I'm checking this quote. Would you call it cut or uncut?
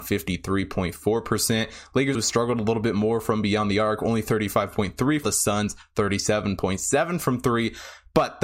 cut